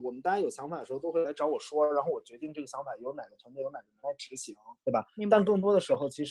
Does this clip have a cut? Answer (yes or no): yes